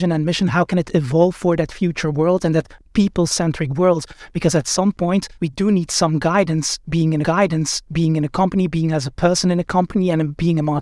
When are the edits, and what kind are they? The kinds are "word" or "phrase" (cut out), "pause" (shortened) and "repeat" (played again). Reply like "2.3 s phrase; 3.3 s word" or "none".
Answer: 5.4 s pause; 7.2 s repeat